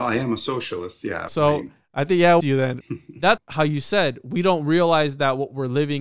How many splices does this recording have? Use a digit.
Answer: 4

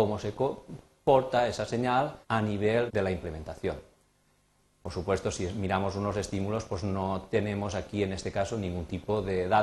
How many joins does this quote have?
2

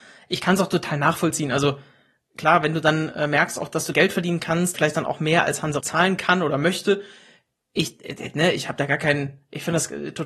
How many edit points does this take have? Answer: 3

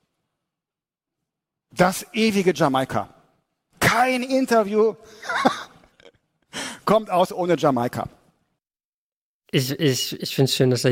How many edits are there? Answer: 0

